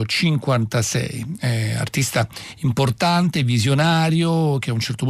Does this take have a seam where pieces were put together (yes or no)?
no